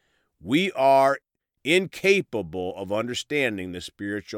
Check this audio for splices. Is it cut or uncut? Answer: uncut